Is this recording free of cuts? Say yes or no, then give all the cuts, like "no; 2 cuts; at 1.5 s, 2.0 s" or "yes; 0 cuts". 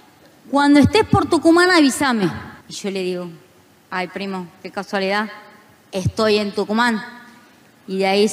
no; 1 cut; at 2.6 s